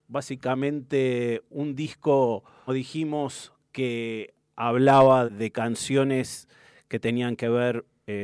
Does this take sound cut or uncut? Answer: cut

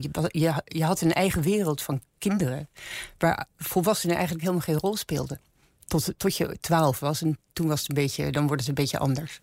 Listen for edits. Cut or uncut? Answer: uncut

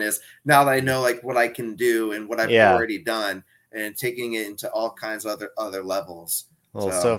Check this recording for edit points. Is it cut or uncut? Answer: uncut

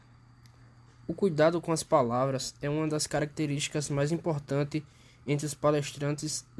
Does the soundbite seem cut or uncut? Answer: uncut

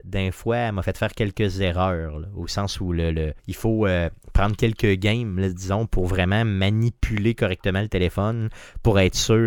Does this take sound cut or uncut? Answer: cut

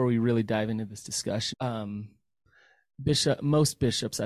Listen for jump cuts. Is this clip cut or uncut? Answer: cut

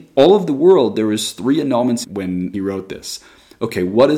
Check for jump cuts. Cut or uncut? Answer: cut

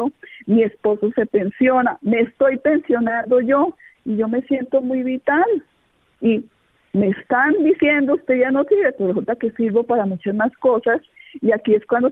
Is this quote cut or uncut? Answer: uncut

